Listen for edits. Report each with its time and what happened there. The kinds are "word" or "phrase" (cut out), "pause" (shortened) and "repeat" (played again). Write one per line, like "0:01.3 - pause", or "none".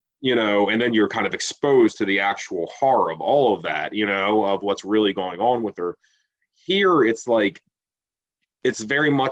none